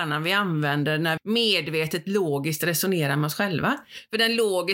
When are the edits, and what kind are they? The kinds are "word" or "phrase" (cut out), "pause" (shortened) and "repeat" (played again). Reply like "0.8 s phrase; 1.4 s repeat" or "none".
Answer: 1.2 s word